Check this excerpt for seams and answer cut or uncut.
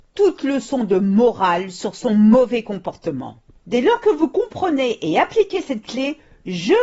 uncut